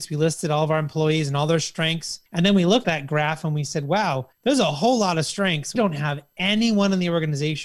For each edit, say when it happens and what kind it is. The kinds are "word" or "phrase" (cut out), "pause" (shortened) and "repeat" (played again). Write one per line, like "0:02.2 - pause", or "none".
0:02.3 - pause
0:02.8 - word
0:04.3 - pause
0:05.8 - word